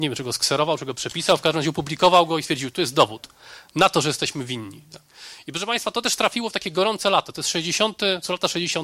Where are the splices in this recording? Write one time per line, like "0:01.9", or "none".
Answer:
none